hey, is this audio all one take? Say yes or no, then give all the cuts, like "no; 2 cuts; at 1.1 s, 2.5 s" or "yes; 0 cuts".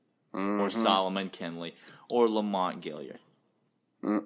yes; 0 cuts